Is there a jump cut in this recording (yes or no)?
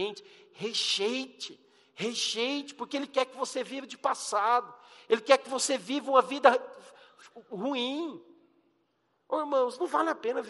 no